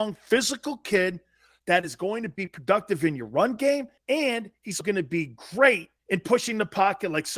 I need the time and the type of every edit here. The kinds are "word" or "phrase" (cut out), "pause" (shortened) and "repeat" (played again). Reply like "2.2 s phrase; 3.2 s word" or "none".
4.0 s pause; 4.8 s word; 6.0 s pause

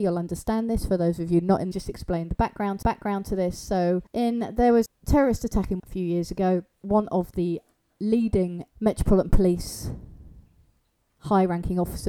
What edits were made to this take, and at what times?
1.7 s phrase; 2.8 s repeat; 4.1 s pause; 4.9 s word; 5.8 s word; 6.8 s word; 8.7 s pause

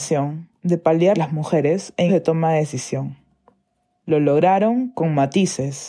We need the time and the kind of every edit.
1.1 s phrase; 2.1 s word

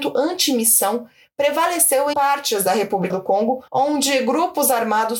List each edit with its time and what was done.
2.1 s word; 3.1 s word; 3.7 s pause

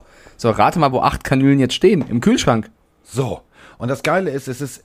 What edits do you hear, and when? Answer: none

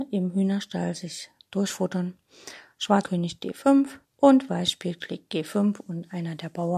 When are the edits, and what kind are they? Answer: 3.0 s word; 4.0 s pause; 5.0 s word

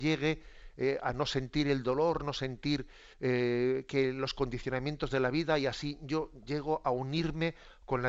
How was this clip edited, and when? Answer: 3.1 s pause

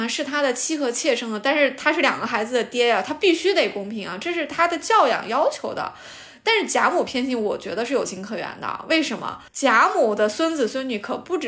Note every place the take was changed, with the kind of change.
9.5 s pause

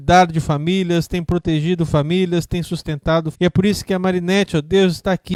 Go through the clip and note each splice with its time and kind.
3.3 s word

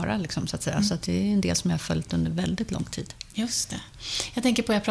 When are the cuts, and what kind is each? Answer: none

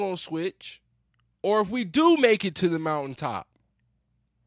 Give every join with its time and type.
none

